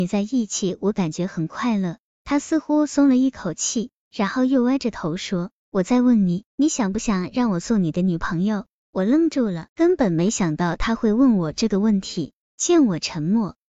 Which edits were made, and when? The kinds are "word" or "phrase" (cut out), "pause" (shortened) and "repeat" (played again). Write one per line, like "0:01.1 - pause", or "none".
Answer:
0:06.5 - pause
0:09.7 - pause